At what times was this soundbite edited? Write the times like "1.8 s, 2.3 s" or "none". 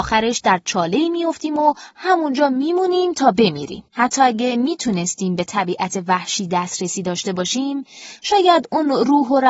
3.9 s